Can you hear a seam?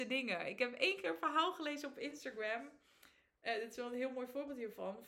no; 0 cuts

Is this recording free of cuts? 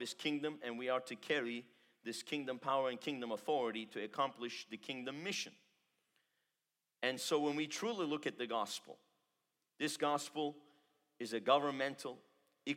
yes; 0 cuts

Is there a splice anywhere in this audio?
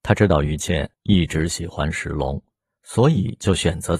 yes; 1 cut; at 0.9 s

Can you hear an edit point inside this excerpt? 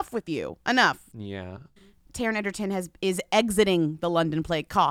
no; 0 cuts

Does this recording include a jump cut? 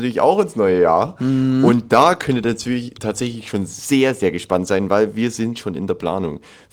no; 0 cuts

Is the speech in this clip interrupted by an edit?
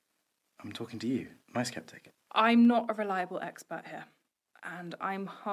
yes; 1 cut; at 1.4 s

